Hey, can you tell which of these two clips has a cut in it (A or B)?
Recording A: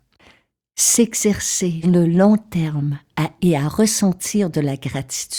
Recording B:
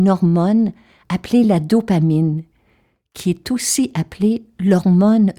A